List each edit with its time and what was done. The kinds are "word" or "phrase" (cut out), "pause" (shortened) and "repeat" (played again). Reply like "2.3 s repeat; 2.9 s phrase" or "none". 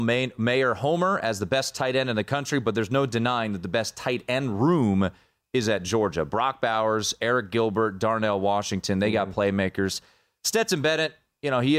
none